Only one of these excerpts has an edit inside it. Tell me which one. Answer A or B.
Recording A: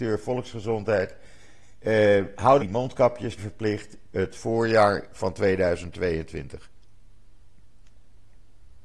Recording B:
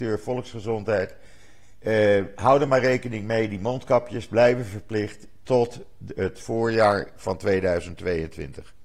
A